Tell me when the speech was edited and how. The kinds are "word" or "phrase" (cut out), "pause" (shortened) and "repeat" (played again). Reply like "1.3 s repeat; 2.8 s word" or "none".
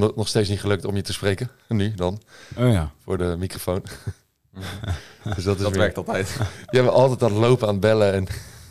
none